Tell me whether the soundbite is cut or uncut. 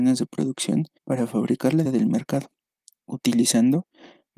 cut